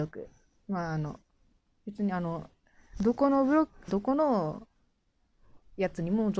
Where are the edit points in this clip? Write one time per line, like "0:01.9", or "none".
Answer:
0:01.5
0:03.9